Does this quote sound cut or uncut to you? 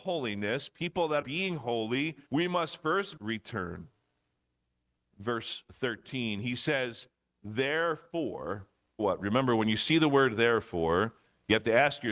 cut